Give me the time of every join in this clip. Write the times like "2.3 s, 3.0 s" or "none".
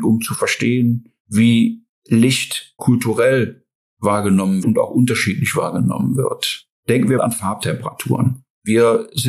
1.2 s, 2.8 s, 4.6 s, 6.8 s, 7.2 s